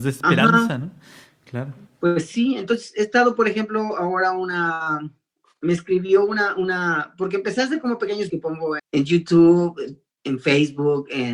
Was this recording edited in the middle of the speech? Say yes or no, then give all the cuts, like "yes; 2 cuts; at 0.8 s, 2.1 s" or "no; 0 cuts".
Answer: yes; 2 cuts; at 8.3 s, 8.8 s